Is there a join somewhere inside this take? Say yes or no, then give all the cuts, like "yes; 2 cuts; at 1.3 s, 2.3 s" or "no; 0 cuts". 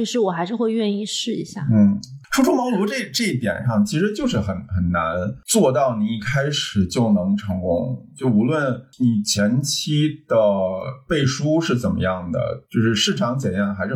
yes; 1 cut; at 12.6 s